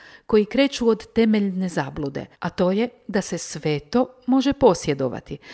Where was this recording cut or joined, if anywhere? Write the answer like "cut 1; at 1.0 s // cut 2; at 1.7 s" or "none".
cut 1; at 2.3 s